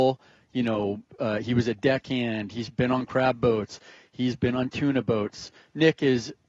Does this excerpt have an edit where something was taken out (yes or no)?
no